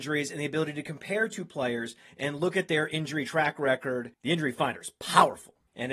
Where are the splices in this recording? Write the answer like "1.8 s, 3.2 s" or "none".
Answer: 4.1 s